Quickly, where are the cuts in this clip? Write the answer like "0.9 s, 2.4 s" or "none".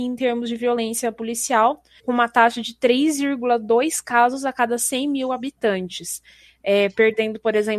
2.0 s